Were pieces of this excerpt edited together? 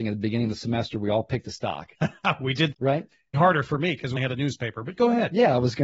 yes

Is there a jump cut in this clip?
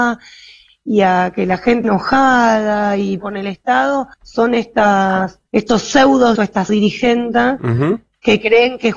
yes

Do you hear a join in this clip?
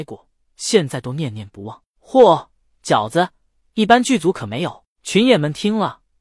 no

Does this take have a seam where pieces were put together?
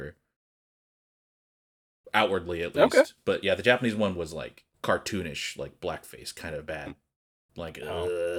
yes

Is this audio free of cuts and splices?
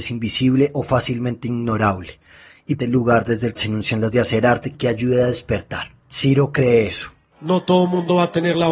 no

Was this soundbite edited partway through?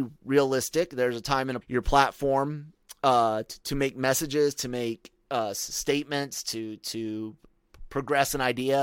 yes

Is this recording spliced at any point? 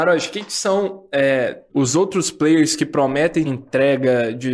yes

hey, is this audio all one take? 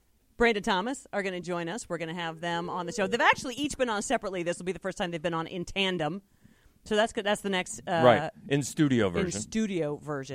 yes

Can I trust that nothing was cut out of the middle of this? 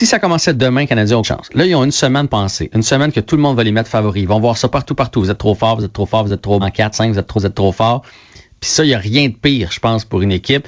no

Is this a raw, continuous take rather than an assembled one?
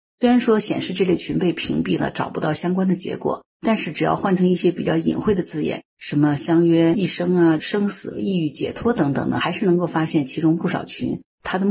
no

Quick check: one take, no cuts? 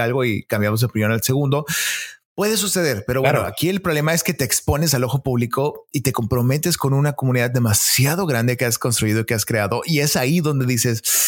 yes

